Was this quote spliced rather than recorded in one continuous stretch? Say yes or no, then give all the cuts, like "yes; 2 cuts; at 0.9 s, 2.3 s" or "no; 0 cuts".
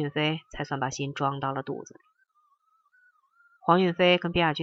no; 0 cuts